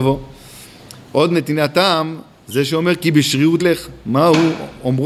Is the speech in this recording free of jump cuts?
no; 1 cut; at 3.6 s

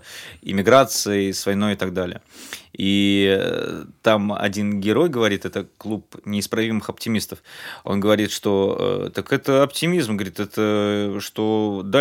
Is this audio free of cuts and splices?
yes; 0 cuts

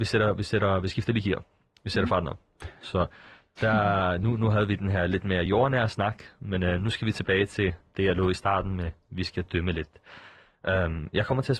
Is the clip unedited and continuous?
yes; 0 cuts

